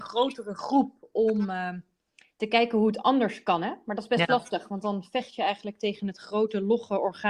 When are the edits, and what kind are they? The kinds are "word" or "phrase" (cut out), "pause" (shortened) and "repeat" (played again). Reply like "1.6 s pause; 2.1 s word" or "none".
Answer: none